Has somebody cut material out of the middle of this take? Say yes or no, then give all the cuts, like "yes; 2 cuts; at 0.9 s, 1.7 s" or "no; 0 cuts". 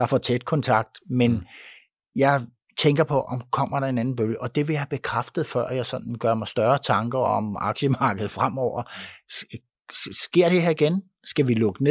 no; 0 cuts